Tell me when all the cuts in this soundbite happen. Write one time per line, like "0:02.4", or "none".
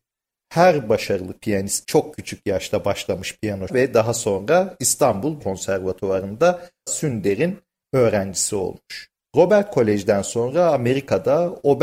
0:01.8
0:03.7
0:05.4
0:06.9